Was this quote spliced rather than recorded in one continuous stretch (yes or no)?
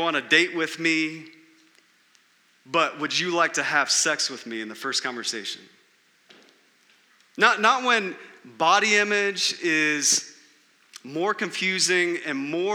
no